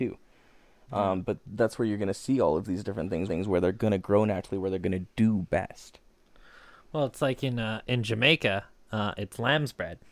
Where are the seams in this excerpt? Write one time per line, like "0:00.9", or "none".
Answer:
0:03.3